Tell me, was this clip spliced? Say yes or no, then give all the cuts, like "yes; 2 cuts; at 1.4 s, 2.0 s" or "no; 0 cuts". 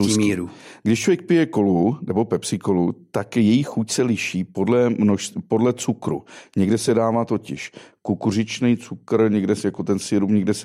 no; 0 cuts